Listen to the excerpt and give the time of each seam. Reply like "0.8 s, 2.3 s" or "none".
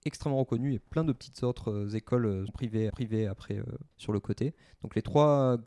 2.5 s, 2.9 s, 3.9 s